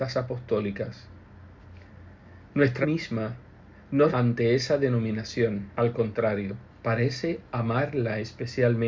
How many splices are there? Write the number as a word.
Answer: four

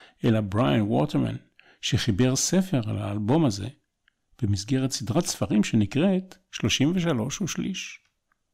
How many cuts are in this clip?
zero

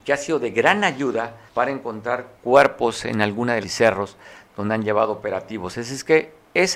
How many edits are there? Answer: three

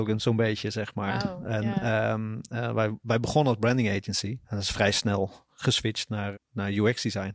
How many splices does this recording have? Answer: two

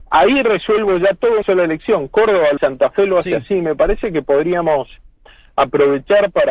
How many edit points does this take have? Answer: two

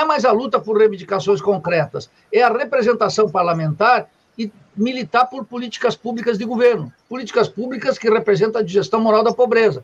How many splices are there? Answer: zero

